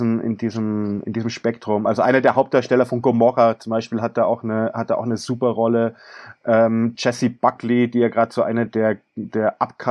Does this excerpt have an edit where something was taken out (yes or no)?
no